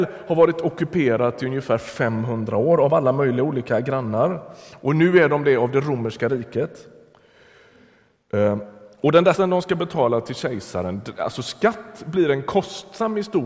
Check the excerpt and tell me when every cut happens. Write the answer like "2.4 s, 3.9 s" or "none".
9.3 s

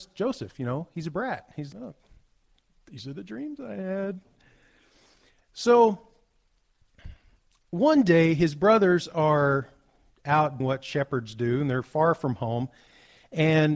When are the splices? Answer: 1.7 s, 10.6 s

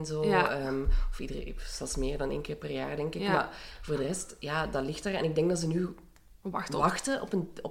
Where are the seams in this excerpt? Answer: none

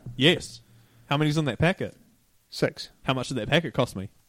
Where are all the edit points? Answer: none

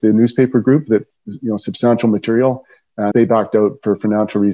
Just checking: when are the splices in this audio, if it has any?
3.1 s

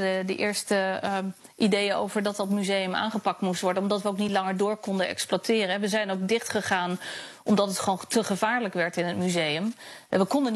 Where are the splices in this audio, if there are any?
none

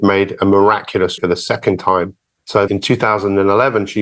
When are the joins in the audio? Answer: 1.2 s, 2.7 s

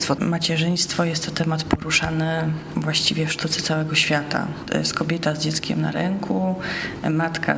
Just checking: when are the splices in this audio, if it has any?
none

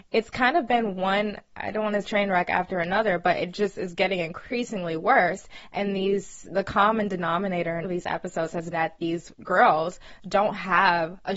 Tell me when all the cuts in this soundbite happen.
2.0 s, 7.8 s, 8.7 s

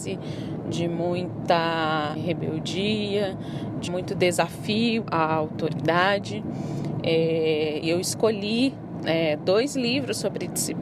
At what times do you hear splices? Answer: 2.2 s, 3.9 s, 5.0 s, 7.8 s

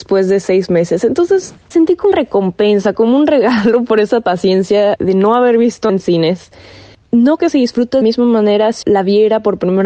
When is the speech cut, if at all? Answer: 1.7 s, 2.1 s, 5.0 s, 5.9 s, 7.4 s, 8.0 s, 8.8 s

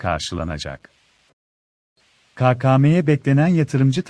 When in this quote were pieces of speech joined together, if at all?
none

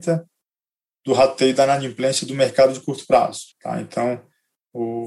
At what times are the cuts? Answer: 3.5 s

